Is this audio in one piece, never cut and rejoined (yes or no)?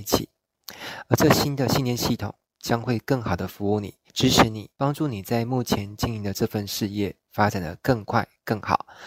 no